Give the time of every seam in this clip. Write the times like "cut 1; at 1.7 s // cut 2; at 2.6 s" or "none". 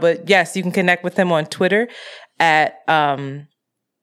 none

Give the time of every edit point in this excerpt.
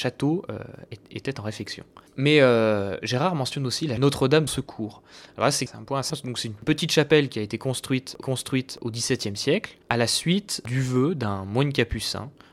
cut 1; at 2.1 s // cut 2; at 4.0 s // cut 3; at 4.5 s // cut 4; at 6.1 s // cut 5; at 8.2 s // cut 6; at 9.8 s

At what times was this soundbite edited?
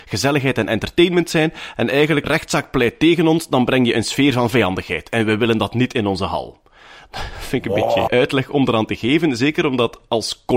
cut 1; at 2.2 s // cut 2; at 8.1 s

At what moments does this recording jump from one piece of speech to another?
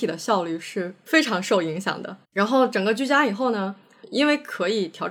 cut 1; at 2.2 s

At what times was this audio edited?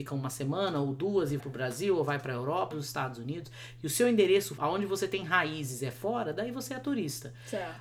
cut 1; at 1.4 s // cut 2; at 2.7 s // cut 3; at 4.6 s

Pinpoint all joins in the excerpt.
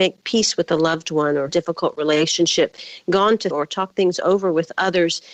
cut 1; at 1.5 s // cut 2; at 3.5 s

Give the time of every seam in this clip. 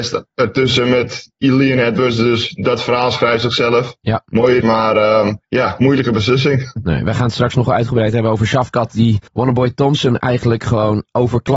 cut 1; at 4.6 s // cut 2; at 5.4 s // cut 3; at 9.3 s

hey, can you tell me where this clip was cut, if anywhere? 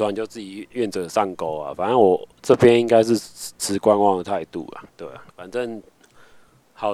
cut 1; at 4.9 s // cut 2; at 5.3 s

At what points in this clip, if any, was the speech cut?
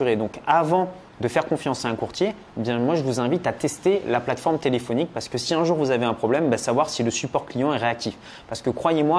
cut 1; at 1.1 s

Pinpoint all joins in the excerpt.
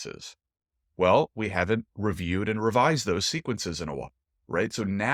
none

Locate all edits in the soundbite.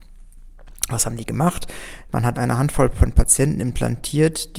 cut 1; at 2.3 s

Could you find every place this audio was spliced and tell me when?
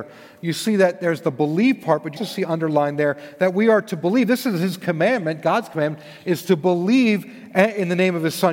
cut 1; at 2.2 s

